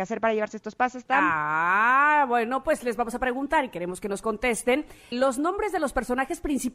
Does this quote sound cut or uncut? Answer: cut